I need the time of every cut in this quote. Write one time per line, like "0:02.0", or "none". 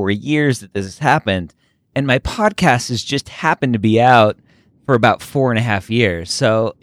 none